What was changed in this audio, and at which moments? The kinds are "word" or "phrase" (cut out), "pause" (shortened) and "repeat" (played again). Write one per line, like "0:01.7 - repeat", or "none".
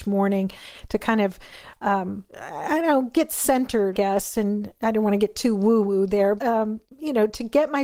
0:02.3 - pause
0:03.9 - word
0:06.4 - word